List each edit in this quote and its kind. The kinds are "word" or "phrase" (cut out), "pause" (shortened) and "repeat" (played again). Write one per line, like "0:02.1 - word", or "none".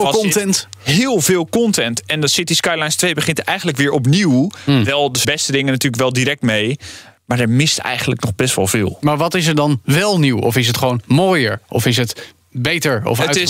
0:05.2 - phrase